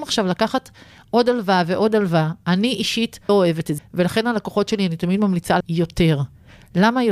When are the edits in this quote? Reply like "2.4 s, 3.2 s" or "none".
3.3 s, 3.8 s, 5.6 s